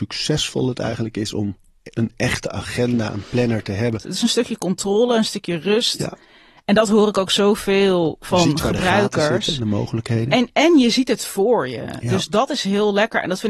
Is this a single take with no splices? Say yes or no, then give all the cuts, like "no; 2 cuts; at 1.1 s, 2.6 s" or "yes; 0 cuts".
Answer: yes; 0 cuts